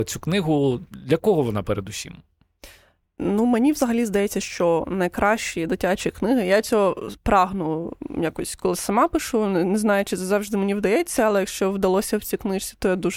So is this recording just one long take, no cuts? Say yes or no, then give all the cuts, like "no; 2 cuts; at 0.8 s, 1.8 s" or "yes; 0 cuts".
yes; 0 cuts